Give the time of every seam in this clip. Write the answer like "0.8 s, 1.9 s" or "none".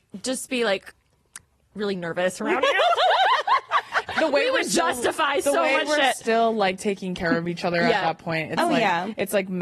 none